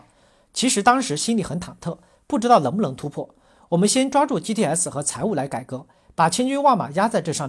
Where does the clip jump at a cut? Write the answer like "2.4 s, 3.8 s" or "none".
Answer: none